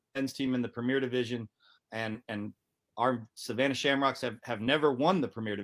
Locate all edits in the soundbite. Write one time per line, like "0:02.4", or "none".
none

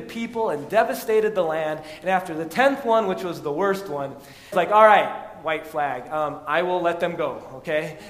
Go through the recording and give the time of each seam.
0:04.5

